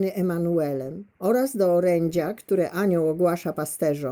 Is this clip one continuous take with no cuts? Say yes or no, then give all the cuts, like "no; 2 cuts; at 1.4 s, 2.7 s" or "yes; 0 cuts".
no; 1 cut; at 1.1 s